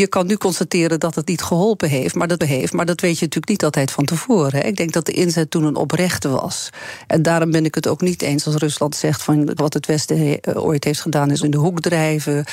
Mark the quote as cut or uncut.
cut